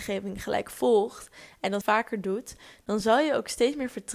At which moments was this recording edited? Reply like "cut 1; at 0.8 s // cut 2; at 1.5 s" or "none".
cut 1; at 1.8 s